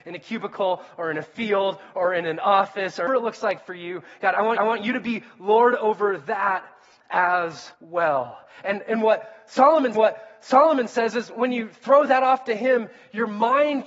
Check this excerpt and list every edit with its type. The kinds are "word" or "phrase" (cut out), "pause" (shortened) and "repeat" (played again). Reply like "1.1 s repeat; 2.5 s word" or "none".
3.1 s phrase; 4.6 s repeat; 7.7 s pause; 9.9 s repeat